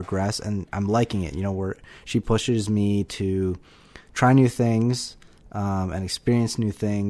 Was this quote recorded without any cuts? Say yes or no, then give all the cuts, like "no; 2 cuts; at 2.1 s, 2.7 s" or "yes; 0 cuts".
yes; 0 cuts